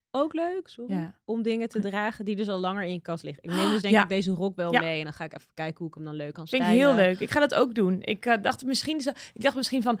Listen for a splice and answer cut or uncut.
uncut